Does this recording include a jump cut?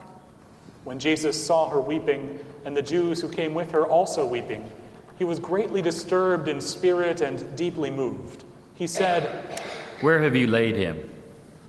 no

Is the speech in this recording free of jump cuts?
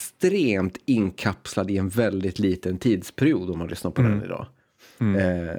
yes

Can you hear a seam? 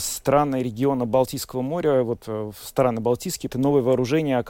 yes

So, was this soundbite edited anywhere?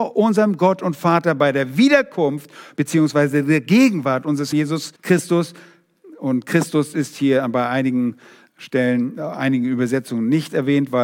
yes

